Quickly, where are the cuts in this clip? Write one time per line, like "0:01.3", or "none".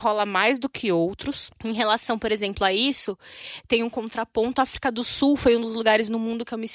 0:01.6